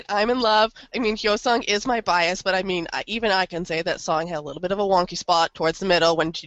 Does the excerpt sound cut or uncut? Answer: uncut